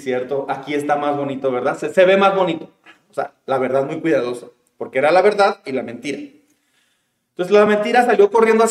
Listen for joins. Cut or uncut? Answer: uncut